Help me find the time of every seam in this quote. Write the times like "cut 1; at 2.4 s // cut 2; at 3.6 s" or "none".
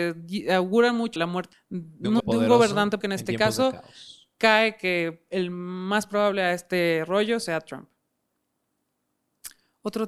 cut 1; at 1.2 s // cut 2; at 1.5 s // cut 3; at 2.2 s // cut 4; at 3.0 s

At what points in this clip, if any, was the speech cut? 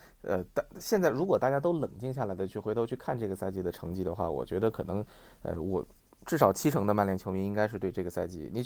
cut 1; at 6.0 s

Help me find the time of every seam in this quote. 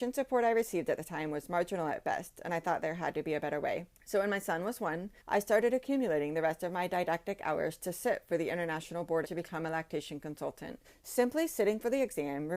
cut 1; at 3.9 s // cut 2; at 5.2 s // cut 3; at 9.2 s // cut 4; at 10.8 s

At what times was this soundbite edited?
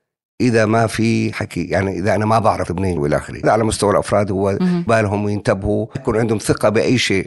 cut 1; at 1.3 s // cut 2; at 2.7 s // cut 3; at 3.0 s // cut 4; at 3.4 s // cut 5; at 4.9 s // cut 6; at 6.0 s

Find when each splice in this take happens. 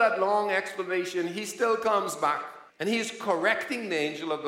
cut 1; at 2.7 s

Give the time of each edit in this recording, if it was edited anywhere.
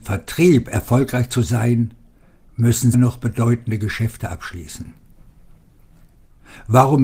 cut 1; at 2.9 s

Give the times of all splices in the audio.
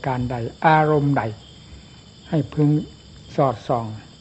none

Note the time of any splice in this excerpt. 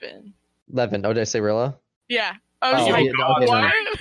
none

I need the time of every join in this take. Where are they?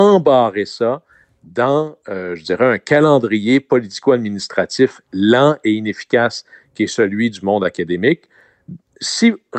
none

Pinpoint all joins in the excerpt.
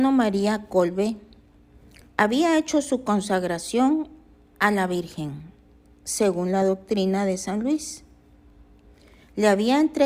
none

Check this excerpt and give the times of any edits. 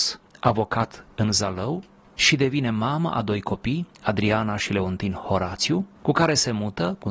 cut 1; at 3.9 s // cut 2; at 5.9 s

